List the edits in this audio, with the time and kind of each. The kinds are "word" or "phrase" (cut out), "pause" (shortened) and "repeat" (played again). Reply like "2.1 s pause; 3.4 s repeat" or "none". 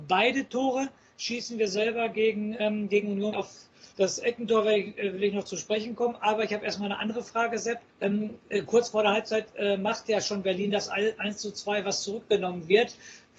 3.3 s word; 3.9 s pause; 7.9 s pause